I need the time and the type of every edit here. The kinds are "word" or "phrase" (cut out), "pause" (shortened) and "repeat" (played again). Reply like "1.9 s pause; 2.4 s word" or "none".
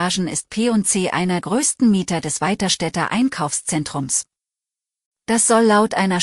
1.4 s word

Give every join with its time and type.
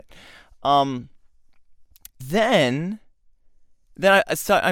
2.2 s word

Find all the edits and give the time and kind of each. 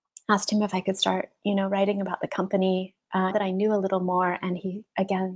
3.3 s word

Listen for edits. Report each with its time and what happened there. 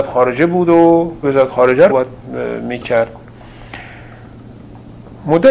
1.2 s word; 1.9 s word

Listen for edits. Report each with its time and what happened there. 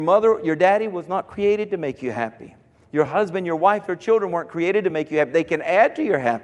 none

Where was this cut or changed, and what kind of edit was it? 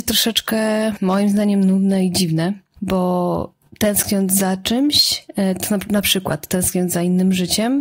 3.7 s pause

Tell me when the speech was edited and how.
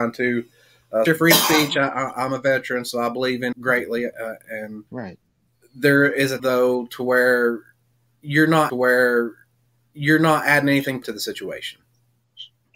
1.1 s word; 3.5 s word; 4.9 s pause; 6.4 s word; 8.7 s repeat; 11.0 s word

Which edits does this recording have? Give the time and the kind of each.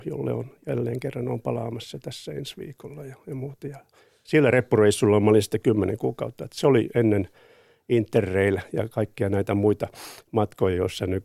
none

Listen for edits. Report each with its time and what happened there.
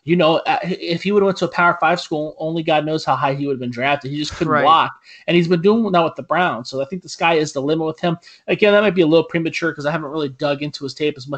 none

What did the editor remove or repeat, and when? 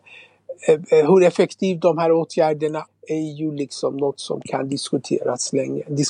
2.9 s word

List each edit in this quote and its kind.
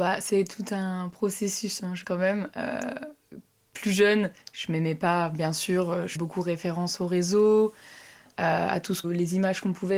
2.0 s word; 4.4 s pause; 6.1 s word; 9.0 s word

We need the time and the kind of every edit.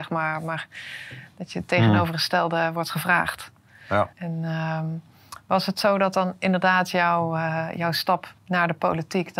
4.1 s pause; 8.4 s pause

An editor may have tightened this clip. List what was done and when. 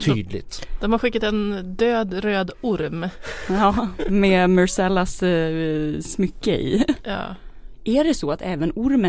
none

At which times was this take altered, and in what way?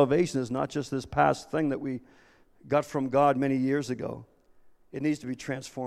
none

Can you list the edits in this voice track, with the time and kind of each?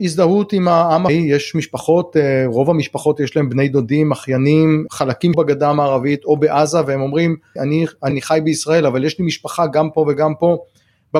1.1 s word; 5.3 s phrase; 7.6 s phrase; 8.1 s word

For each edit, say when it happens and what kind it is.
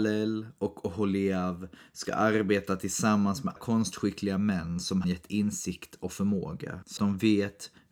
3.6 s word; 5.0 s word; 7.0 s word

